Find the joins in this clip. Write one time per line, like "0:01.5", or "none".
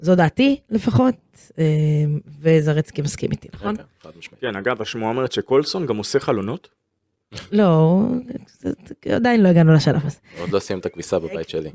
none